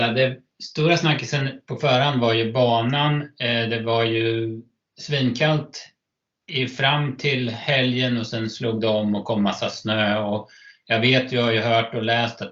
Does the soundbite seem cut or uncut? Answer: uncut